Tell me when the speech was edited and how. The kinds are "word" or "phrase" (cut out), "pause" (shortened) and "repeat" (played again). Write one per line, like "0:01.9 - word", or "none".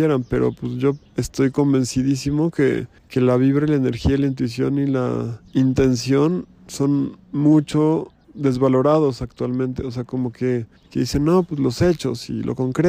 0:01.1 - pause
0:03.0 - pause
0:05.5 - pause
0:08.2 - word
0:10.8 - pause